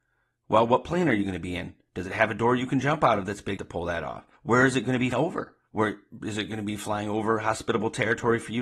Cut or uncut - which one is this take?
cut